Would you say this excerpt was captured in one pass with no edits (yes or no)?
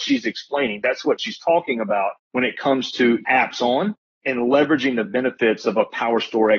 yes